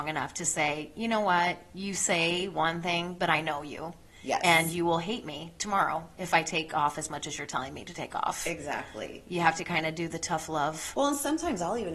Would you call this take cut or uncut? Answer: uncut